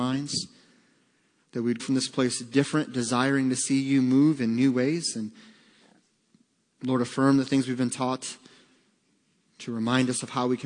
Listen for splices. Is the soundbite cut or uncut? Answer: cut